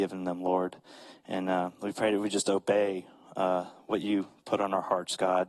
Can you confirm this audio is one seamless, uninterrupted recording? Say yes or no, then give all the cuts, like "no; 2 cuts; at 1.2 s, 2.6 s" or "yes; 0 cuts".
yes; 0 cuts